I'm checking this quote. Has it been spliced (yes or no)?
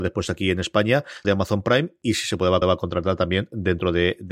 yes